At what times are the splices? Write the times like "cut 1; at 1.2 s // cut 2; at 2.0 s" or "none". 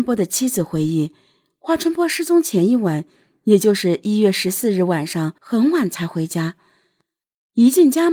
cut 1; at 5.4 s